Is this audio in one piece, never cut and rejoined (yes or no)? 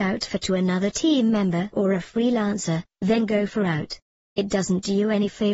yes